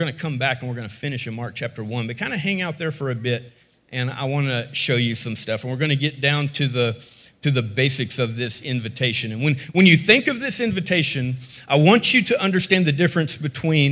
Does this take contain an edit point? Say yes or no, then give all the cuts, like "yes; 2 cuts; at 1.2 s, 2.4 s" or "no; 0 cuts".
no; 0 cuts